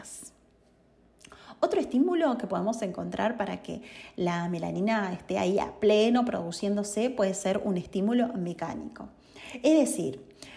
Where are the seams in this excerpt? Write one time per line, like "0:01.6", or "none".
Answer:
none